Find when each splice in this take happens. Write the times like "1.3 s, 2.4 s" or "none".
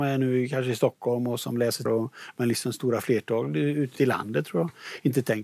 1.9 s, 4.0 s